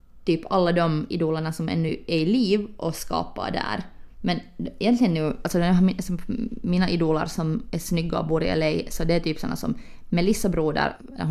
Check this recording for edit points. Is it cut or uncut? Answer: uncut